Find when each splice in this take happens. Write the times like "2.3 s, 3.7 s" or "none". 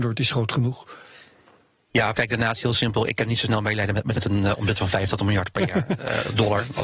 2.1 s, 4.1 s